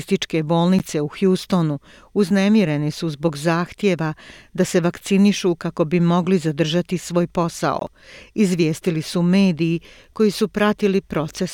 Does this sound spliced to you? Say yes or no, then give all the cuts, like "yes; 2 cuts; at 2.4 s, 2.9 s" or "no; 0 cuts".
no; 0 cuts